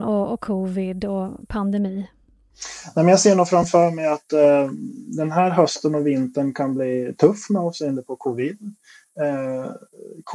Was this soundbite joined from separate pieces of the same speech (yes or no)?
no